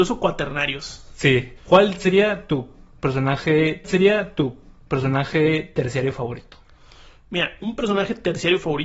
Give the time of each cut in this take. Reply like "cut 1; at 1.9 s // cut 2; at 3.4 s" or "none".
cut 1; at 1.6 s // cut 2; at 3.8 s